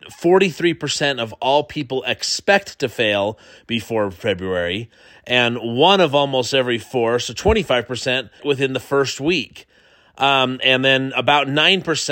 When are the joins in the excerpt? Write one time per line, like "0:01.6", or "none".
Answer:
0:08.4